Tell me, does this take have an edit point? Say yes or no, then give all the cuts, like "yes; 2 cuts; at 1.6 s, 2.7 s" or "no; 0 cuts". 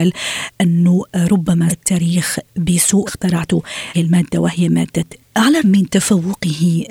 yes; 5 cuts; at 1.7 s, 3.1 s, 3.9 s, 5.2 s, 5.6 s